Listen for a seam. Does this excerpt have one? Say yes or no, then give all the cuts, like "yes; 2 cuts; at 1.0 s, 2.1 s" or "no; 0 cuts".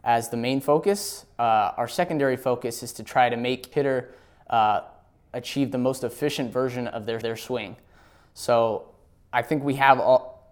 yes; 2 cuts; at 3.7 s, 7.2 s